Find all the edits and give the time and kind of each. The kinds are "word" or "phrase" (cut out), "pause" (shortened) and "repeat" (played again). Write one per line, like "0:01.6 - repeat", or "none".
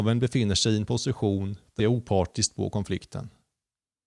0:01.8 - phrase